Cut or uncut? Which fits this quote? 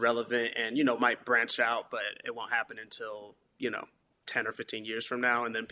uncut